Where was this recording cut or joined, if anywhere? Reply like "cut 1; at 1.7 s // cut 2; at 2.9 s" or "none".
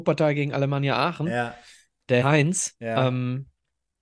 cut 1; at 2.2 s